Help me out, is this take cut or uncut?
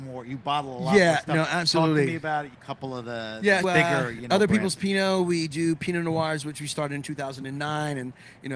cut